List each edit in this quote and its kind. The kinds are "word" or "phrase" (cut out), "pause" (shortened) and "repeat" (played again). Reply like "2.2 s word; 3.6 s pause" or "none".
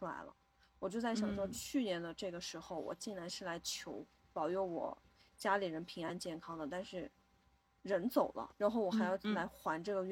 8.5 s word